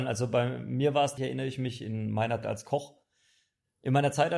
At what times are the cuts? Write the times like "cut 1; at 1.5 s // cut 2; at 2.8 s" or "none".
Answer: cut 1; at 1.2 s // cut 2; at 2.4 s